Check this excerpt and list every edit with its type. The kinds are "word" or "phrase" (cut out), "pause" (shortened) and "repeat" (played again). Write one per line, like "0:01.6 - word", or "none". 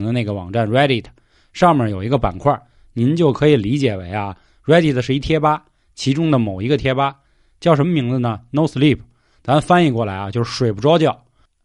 none

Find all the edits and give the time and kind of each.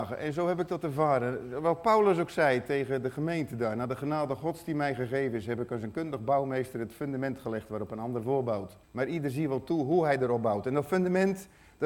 0:08.8 - pause

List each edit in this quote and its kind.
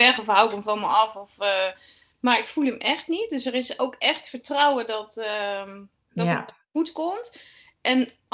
none

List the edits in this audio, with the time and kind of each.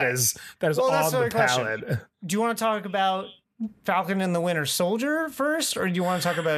0:02.1 - pause

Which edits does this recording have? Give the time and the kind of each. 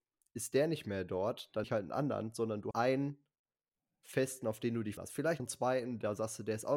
0:01.6 - word
0:02.7 - word
0:05.0 - word
0:05.4 - word

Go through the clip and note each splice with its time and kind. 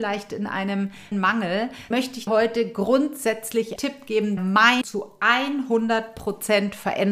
0:01.1 - word
0:01.9 - word
0:02.3 - word
0:03.8 - word
0:04.4 - word
0:04.8 - word

